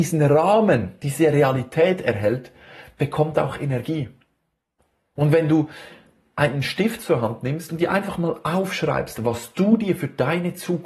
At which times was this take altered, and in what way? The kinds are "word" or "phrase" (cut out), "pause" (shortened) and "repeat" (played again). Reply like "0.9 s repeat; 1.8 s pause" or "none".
none